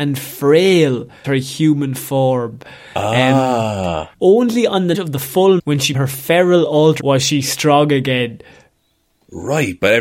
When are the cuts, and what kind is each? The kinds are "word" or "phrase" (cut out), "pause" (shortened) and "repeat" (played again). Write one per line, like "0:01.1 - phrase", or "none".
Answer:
0:01.2 - word
0:04.1 - pause
0:04.9 - word
0:05.6 - word
0:05.9 - word
0:07.0 - word